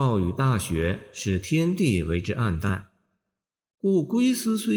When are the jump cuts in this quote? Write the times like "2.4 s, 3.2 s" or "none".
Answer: none